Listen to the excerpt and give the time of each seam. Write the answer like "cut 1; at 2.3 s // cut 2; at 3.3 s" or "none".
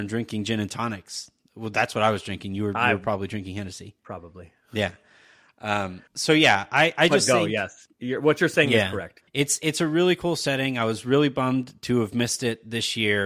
cut 1; at 4.0 s // cut 2; at 6.1 s // cut 3; at 7.9 s // cut 4; at 9.3 s

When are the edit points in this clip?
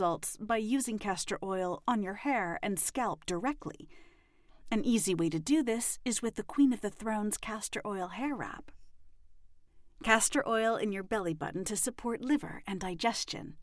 none

